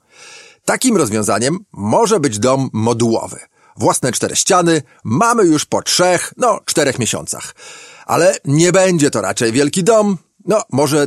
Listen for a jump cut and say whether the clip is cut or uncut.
uncut